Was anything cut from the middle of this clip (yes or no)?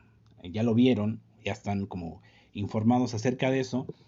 no